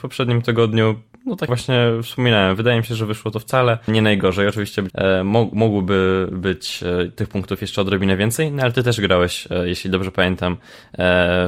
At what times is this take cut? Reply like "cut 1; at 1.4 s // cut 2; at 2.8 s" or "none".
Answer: cut 1; at 1.5 s // cut 2; at 3.9 s // cut 3; at 4.9 s